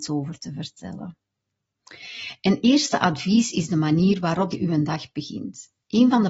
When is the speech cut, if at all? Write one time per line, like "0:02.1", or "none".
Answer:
0:04.5

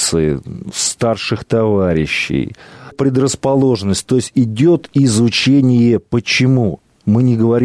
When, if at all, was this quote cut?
0:02.9

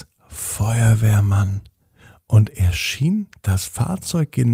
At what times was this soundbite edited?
none

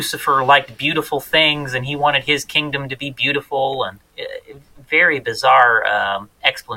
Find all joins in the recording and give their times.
none

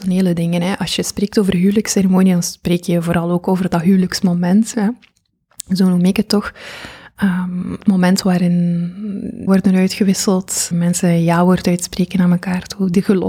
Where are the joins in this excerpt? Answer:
0:07.8
0:09.5
0:10.7

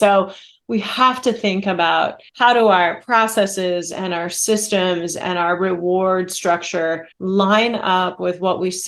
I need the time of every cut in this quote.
0:02.3
0:07.1

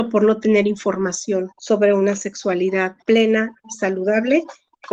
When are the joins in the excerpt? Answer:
0:01.5
0:03.0

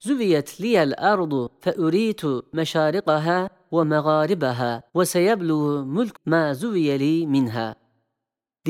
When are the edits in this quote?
0:04.9
0:06.1

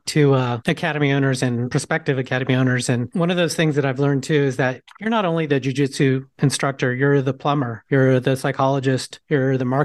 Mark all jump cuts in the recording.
none

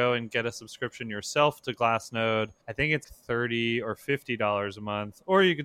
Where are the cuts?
0:02.6
0:03.0

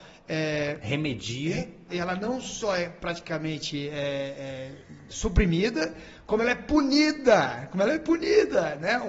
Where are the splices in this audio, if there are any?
0:01.9
0:05.1

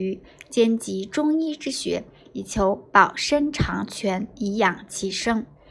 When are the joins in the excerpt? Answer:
none

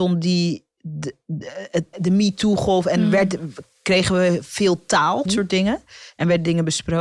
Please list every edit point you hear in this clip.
0:01.9
0:05.3

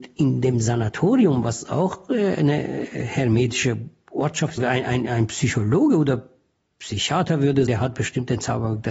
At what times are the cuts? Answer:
0:04.6
0:07.7

